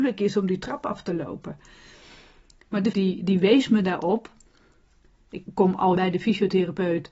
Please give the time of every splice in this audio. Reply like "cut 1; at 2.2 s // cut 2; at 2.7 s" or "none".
cut 1; at 2.9 s // cut 2; at 5.5 s // cut 3; at 5.9 s